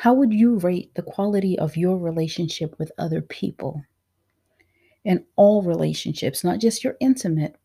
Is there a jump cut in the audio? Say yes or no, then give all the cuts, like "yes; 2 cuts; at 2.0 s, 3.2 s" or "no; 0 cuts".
no; 0 cuts